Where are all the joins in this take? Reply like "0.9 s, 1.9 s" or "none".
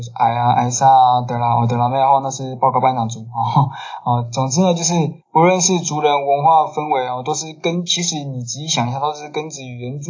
5.2 s